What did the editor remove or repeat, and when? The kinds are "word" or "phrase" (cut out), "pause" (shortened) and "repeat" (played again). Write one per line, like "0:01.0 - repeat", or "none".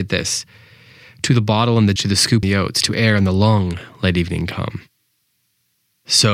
0:02.0 - word
0:02.4 - word